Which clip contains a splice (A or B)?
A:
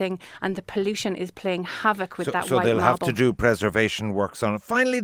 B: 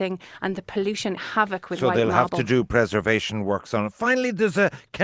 B